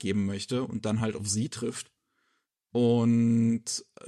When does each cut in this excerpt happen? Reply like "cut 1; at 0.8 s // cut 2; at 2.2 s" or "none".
none